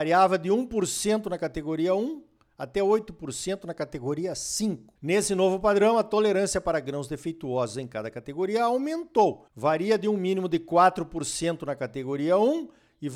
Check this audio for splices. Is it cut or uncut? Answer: uncut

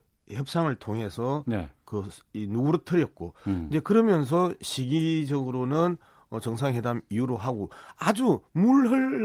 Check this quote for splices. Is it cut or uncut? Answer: uncut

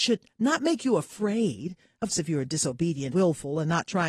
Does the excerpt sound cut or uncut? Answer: cut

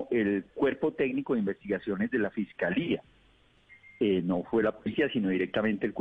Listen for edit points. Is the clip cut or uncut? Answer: uncut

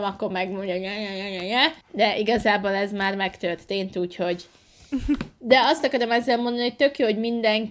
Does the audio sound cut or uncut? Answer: cut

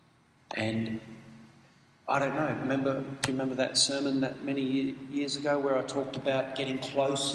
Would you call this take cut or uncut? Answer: uncut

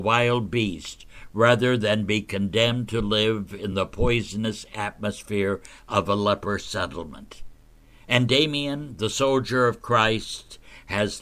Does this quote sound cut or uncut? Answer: uncut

